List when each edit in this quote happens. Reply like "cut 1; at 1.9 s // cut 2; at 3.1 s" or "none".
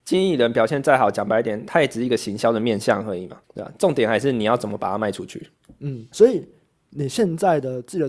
cut 1; at 3.4 s // cut 2; at 6.1 s